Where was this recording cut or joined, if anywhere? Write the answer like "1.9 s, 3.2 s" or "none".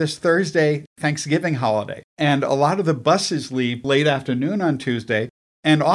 2.1 s